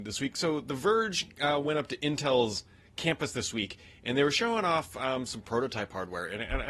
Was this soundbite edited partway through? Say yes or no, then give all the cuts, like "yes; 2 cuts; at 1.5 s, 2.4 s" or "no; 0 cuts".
no; 0 cuts